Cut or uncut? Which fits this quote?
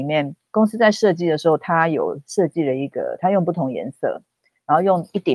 uncut